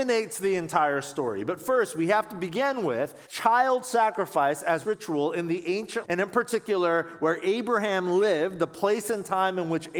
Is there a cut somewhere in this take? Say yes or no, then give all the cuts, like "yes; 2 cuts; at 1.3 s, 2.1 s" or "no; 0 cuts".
yes; 3 cuts; at 3.3 s, 4.8 s, 6.0 s